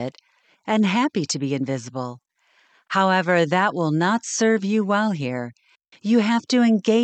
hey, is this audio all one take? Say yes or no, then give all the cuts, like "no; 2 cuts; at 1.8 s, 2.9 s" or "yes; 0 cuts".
yes; 0 cuts